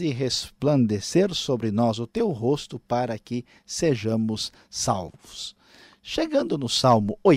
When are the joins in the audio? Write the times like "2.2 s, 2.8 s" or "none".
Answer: none